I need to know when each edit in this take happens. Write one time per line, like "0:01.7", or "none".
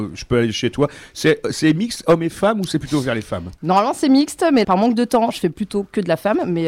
0:03.6
0:04.6